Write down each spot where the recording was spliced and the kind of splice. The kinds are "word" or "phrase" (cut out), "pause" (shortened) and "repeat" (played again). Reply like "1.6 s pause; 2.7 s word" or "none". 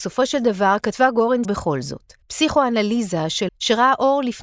1.4 s word; 2.2 s pause; 3.5 s word

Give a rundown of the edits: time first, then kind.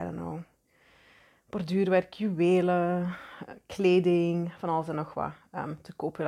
none

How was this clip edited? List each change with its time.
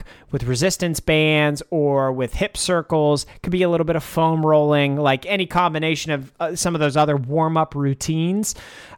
none

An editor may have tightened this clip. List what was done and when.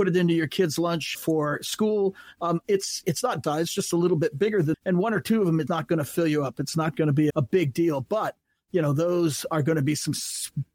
1.1 s word; 3.0 s word; 3.4 s word; 4.7 s word; 5.7 s word; 7.3 s word

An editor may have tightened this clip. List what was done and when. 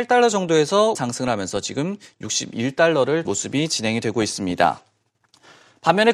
1.0 s word; 3.3 s word

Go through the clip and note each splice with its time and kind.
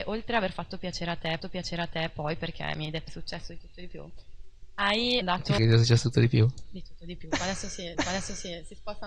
1.4 s repeat; 3.1 s phrase; 5.2 s word; 5.6 s word; 7.9 s repeat

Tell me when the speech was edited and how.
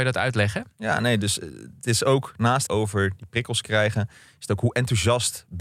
2.7 s phrase

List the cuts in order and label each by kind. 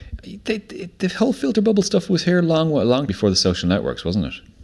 3.1 s word

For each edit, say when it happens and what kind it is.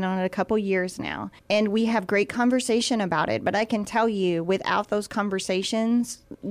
1.4 s pause

